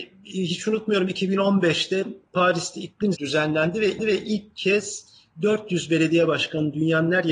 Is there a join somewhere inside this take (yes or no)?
yes